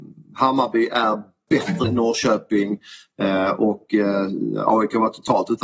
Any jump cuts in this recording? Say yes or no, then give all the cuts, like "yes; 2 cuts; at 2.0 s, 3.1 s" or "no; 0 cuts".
yes; 1 cut; at 1.8 s